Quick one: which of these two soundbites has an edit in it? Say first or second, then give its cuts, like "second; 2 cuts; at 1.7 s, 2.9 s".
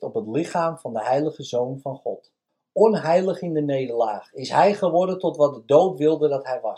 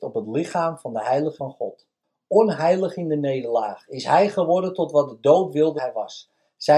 second; 2 cuts; at 1.4 s, 5.8 s